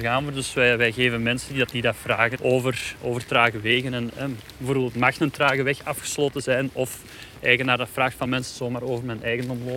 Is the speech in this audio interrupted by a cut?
yes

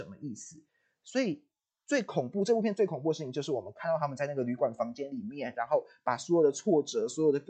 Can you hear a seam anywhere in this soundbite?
no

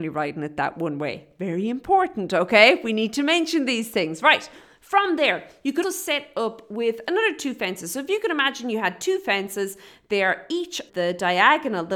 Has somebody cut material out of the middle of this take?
yes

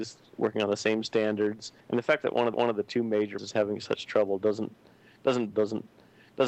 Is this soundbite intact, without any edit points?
no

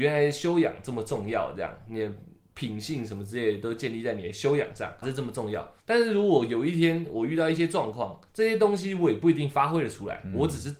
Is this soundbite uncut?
no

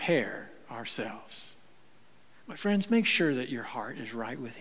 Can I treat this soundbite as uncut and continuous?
yes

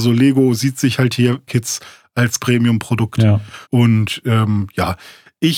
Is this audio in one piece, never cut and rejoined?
no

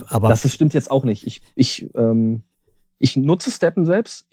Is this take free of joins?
yes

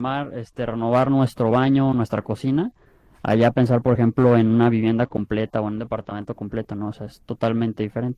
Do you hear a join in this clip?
no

